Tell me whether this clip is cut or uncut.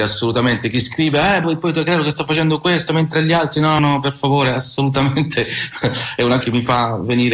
cut